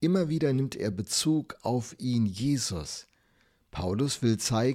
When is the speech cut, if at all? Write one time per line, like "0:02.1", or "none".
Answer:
none